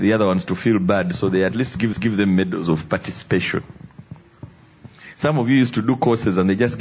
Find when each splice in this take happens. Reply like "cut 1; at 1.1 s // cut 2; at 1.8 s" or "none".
cut 1; at 1.9 s